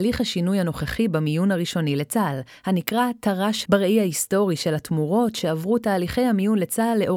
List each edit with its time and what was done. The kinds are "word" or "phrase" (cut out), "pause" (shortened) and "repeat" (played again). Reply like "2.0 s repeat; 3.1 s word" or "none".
3.6 s word